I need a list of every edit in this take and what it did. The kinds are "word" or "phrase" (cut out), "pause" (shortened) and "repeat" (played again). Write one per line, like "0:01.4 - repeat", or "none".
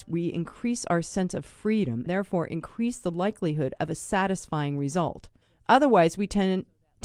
0:02.1 - word
0:05.4 - pause